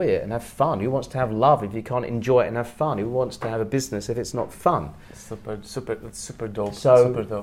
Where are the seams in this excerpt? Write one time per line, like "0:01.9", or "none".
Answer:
0:05.0

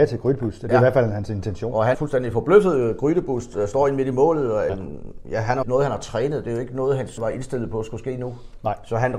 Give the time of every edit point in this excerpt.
0:01.9
0:04.7
0:05.6
0:07.2

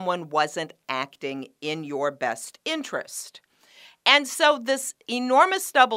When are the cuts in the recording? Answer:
none

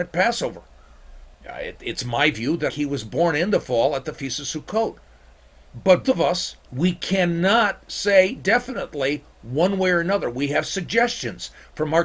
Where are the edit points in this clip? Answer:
0:01.3
0:02.7
0:06.0
0:06.6

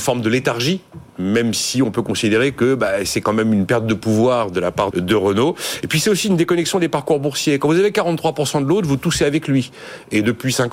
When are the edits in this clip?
0:04.9

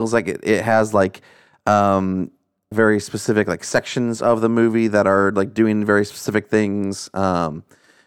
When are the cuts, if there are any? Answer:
0:02.7

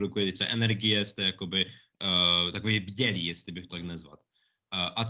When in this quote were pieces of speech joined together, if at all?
0:03.7

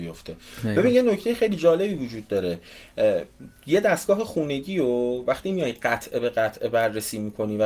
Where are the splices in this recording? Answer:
none

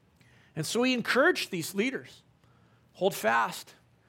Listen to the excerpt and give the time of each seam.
none

